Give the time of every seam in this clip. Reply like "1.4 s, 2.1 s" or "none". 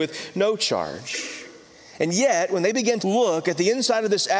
3.0 s